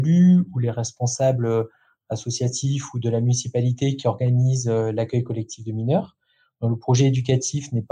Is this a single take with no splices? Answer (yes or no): yes